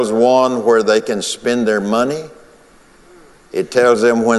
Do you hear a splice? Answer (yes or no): no